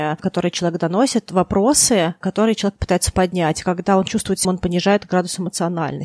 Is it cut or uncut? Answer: cut